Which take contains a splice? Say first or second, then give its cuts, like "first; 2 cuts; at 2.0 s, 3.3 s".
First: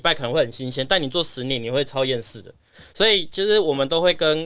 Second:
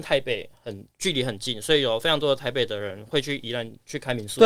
second; 1 cut; at 0.9 s